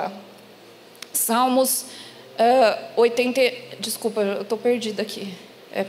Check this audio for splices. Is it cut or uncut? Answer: uncut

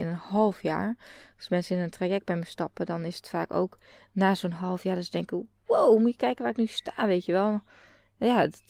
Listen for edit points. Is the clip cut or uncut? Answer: uncut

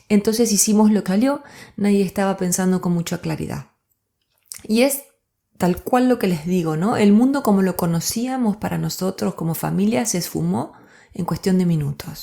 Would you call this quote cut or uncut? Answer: cut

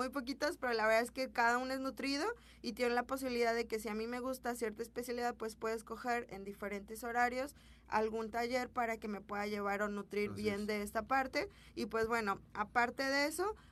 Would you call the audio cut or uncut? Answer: uncut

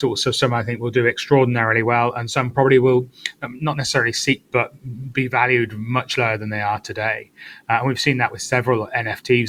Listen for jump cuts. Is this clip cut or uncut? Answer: cut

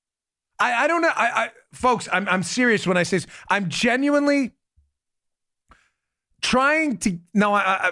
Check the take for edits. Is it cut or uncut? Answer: uncut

